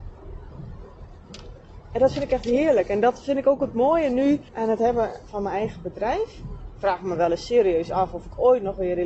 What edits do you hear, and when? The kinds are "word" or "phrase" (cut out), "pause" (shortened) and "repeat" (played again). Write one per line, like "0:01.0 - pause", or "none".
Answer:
0:04.5 - pause